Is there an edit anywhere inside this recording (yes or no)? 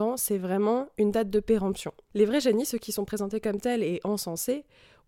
no